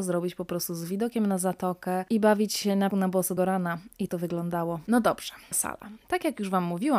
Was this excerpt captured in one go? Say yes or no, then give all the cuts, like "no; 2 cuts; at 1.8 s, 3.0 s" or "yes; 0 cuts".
no; 4 cuts; at 2.9 s, 3.4 s, 4.1 s, 5.5 s